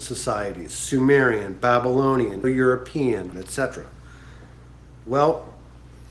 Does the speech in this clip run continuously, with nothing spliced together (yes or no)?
no